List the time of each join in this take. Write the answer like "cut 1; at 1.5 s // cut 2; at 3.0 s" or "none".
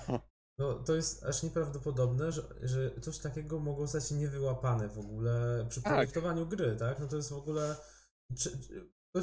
none